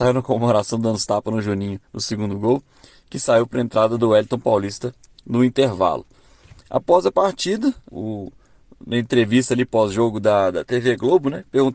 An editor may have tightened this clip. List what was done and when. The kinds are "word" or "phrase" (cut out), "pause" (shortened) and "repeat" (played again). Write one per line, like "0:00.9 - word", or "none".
0:01.8 - pause
0:07.9 - word